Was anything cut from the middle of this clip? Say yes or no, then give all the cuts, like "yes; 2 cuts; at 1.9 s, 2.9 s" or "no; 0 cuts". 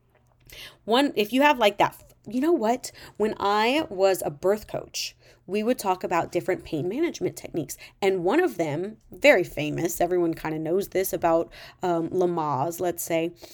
no; 0 cuts